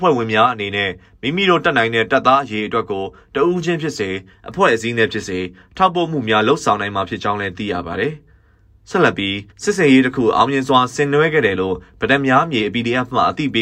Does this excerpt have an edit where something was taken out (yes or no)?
yes